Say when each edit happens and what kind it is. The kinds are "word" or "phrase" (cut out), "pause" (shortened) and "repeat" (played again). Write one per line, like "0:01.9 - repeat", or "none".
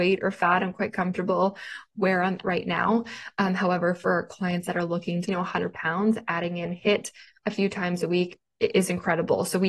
0:02.4 - word
0:05.2 - phrase